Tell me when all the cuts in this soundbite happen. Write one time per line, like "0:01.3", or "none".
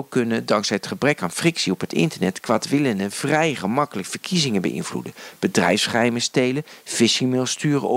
none